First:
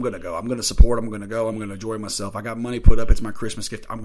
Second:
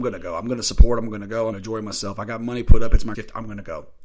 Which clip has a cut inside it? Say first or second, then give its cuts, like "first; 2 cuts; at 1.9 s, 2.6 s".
second; 2 cuts; at 1.5 s, 3.1 s